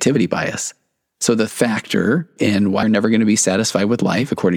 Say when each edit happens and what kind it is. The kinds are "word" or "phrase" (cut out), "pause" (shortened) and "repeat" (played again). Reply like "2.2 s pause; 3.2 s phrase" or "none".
1.5 s word; 2.8 s word